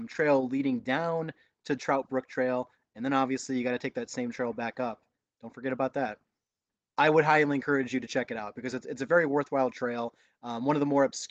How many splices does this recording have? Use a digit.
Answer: 0